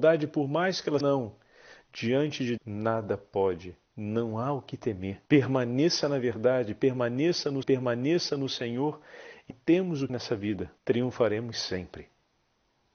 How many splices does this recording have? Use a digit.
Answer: 8